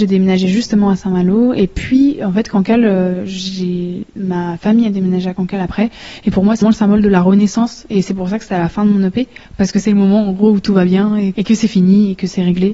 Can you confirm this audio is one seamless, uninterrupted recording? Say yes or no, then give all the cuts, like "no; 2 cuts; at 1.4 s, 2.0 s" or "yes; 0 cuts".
no; 2 cuts; at 6.6 s, 11.3 s